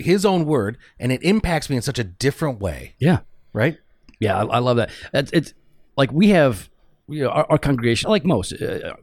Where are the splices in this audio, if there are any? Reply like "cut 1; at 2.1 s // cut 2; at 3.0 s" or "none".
cut 1; at 8.0 s